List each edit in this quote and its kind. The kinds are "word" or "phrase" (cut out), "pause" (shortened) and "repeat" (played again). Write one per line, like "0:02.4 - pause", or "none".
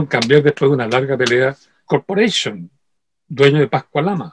0:01.9 - phrase